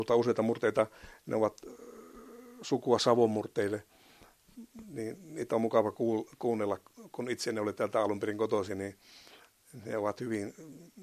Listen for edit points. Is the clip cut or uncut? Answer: uncut